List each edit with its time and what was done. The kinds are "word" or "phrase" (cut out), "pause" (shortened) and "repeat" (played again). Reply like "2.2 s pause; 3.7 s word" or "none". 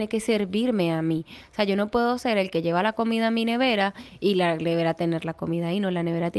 none